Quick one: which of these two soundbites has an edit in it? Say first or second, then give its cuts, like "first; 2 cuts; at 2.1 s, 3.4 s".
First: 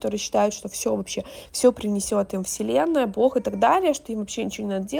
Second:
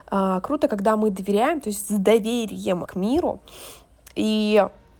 second; 1 cut; at 2.9 s